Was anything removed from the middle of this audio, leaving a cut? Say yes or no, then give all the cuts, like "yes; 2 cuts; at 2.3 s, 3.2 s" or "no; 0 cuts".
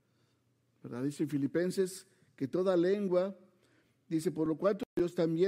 no; 0 cuts